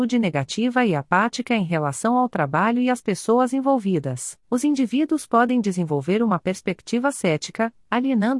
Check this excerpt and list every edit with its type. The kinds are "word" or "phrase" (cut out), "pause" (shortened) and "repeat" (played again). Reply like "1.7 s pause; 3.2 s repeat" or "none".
4.4 s pause